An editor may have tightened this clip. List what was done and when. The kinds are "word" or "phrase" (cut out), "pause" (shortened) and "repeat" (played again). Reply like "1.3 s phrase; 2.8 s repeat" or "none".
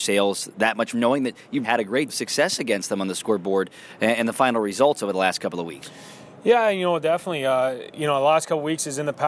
0.9 s phrase; 1.6 s word; 2.1 s word